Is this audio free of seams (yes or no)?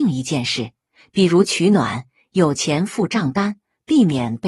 yes